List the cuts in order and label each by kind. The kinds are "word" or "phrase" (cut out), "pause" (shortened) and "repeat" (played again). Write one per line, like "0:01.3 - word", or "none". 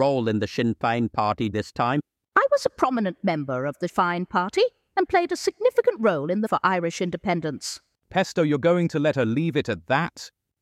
0:01.5 - word
0:03.9 - word
0:06.5 - word